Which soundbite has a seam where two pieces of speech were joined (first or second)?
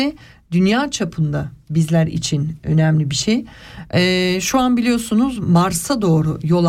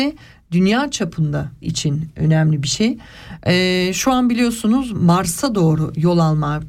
second